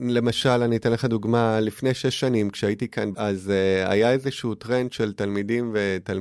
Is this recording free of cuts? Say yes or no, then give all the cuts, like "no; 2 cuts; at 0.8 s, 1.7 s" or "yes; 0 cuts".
no; 1 cut; at 3.1 s